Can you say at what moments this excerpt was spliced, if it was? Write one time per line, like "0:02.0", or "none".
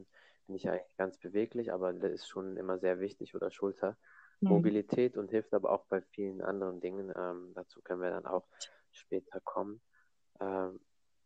0:02.0